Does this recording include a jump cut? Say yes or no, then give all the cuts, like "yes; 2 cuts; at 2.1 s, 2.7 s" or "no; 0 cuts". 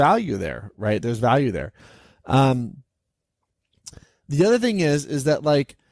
no; 0 cuts